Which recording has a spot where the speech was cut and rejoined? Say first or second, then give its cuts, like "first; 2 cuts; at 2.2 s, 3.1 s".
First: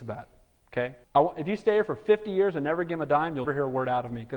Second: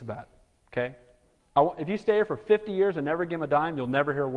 first; 2 cuts; at 1.0 s, 3.4 s